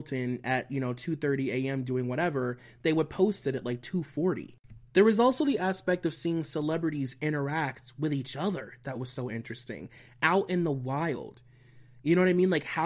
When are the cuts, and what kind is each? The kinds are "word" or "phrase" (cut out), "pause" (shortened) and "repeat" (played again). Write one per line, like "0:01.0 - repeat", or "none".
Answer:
none